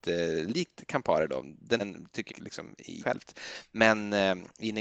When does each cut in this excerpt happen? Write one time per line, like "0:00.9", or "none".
0:01.8
0:02.3
0:03.0